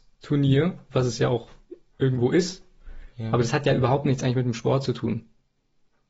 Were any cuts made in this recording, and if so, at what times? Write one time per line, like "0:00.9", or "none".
none